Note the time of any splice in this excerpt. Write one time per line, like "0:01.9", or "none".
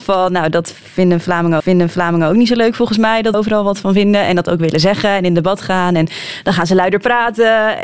0:01.6
0:03.3